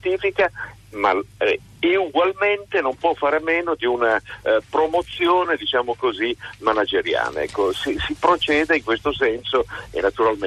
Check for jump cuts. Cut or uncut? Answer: cut